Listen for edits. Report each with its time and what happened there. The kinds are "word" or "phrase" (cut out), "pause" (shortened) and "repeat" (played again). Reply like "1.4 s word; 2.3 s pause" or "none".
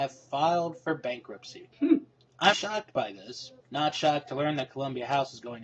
1.7 s pause; 2.5 s word; 3.6 s pause